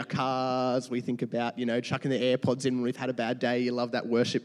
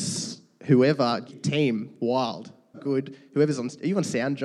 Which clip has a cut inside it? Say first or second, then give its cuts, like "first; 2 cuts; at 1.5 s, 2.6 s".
second; 2 cuts; at 1.3 s, 2.7 s